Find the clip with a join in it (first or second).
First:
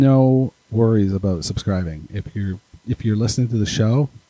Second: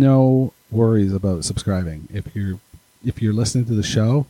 first